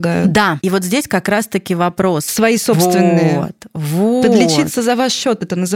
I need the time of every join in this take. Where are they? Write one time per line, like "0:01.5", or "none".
none